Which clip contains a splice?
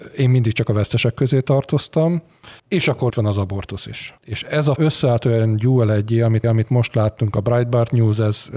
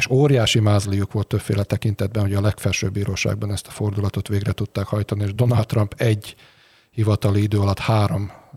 first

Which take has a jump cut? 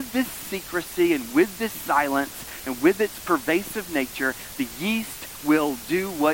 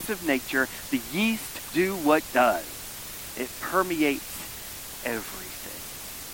second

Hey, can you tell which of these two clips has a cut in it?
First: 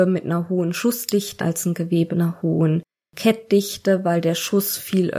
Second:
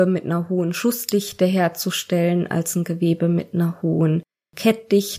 first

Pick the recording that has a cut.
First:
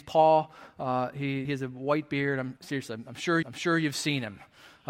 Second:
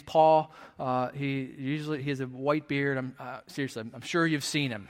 first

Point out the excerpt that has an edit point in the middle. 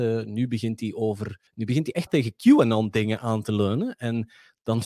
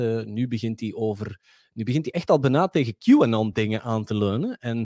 first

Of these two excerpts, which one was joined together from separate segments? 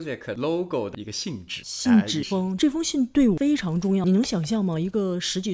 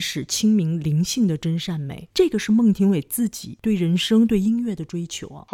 first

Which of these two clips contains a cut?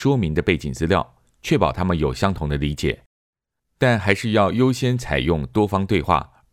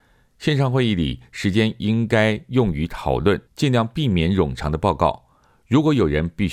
second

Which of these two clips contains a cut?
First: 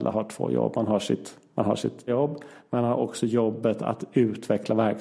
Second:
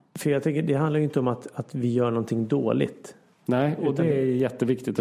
first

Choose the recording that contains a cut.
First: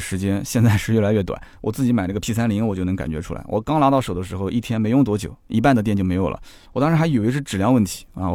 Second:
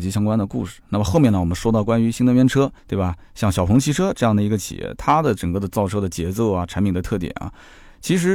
second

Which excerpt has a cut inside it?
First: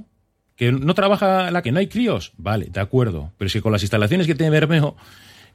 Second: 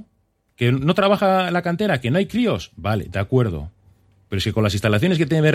first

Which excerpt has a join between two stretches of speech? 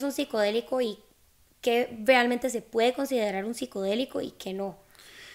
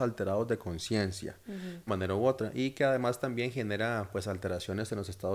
second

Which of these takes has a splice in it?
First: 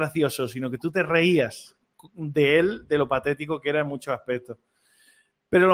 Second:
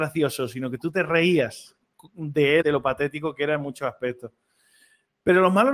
second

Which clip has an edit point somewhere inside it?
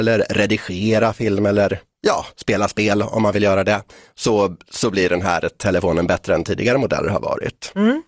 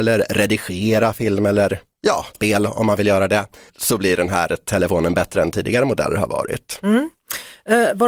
second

